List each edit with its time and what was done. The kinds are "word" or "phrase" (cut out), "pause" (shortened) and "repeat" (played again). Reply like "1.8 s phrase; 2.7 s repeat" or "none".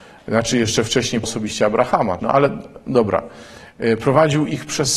1.2 s word; 2.2 s word

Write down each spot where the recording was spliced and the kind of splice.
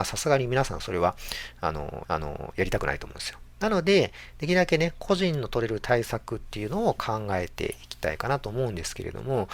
2.0 s repeat

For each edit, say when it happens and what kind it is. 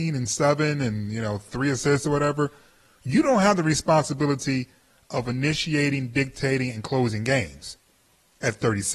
none

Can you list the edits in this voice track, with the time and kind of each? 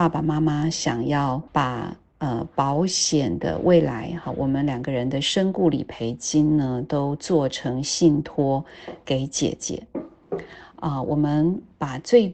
1.5 s pause

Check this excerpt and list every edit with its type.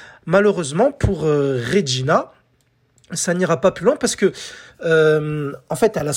none

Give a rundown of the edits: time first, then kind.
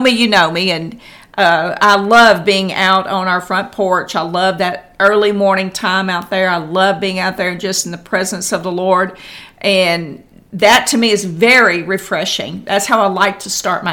none

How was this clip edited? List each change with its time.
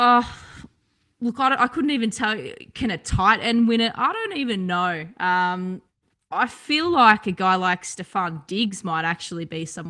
6.1 s pause

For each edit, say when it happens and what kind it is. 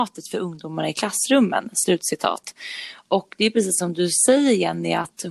none

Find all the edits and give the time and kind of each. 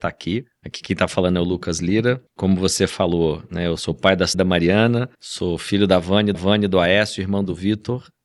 2.3 s pause; 3.8 s word; 4.3 s phrase; 5.1 s pause; 6.3 s repeat

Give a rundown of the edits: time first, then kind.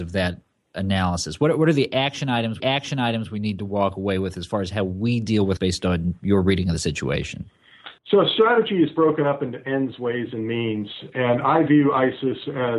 2.6 s repeat; 5.6 s word; 8.0 s pause

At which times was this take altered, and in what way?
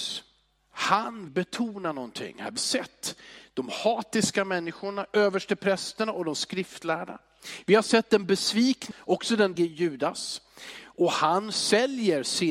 1.3 s word; 2.6 s word; 8.9 s word; 9.6 s word

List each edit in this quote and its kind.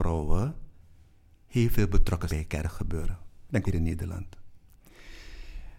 2.3 s word; 3.6 s word

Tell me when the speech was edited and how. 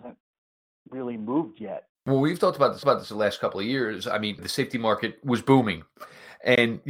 1.9 s pause; 2.8 s repeat; 4.4 s word

